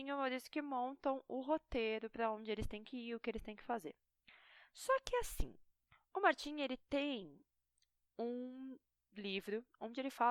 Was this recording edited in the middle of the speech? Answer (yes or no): no